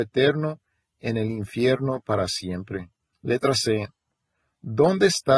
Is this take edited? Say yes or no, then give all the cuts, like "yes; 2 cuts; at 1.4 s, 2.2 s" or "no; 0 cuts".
yes; 1 cut; at 3.1 s